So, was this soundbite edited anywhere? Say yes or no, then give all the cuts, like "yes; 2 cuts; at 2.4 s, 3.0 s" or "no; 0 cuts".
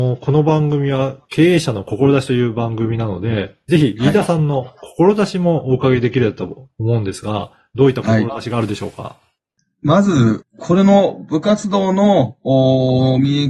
no; 0 cuts